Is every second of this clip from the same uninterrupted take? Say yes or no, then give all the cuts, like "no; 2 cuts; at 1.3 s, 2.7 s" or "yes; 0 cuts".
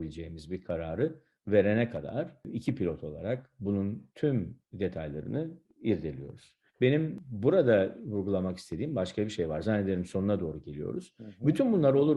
no; 1 cut; at 6.7 s